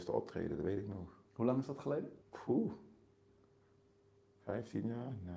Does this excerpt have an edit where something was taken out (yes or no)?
yes